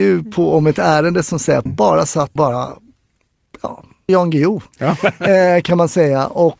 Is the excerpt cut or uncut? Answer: cut